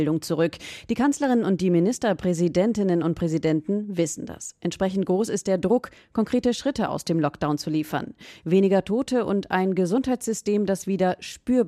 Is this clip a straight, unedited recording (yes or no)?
yes